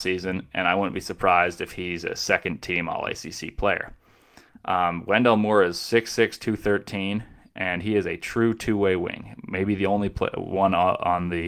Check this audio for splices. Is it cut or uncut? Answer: uncut